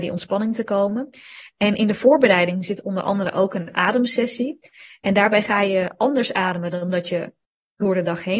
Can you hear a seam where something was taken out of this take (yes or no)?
no